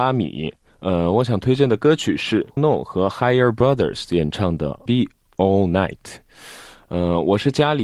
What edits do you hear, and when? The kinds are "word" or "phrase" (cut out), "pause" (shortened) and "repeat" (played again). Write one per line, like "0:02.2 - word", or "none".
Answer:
0:02.6 - word
0:04.9 - phrase